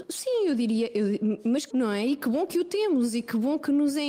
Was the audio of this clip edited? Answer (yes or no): yes